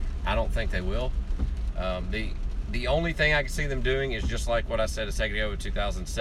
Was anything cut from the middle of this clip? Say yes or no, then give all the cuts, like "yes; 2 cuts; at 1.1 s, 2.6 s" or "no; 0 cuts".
no; 0 cuts